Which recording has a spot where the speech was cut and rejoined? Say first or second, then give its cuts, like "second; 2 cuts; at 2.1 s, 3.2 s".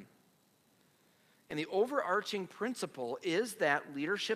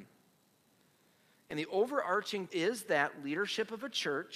second; 1 cut; at 2.5 s